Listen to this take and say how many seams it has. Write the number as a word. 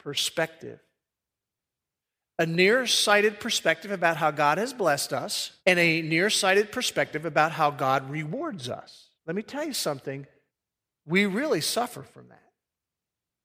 three